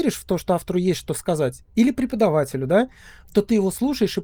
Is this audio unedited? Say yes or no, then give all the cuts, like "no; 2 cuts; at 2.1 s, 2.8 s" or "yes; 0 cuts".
yes; 0 cuts